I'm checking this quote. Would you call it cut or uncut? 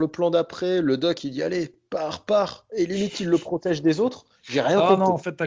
uncut